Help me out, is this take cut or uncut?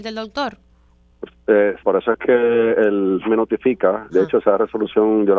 cut